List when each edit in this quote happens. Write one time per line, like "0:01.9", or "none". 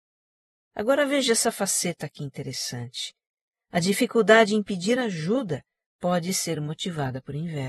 none